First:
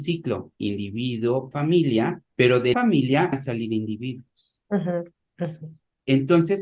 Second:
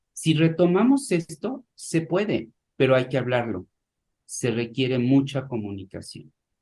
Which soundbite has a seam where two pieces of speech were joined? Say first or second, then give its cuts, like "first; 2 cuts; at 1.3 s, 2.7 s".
first; 4 cuts; at 1.5 s, 2.3 s, 2.7 s, 3.3 s